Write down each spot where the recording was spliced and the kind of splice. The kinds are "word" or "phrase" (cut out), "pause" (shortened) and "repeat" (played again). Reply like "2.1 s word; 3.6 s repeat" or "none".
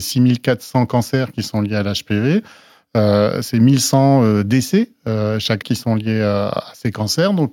5.6 s word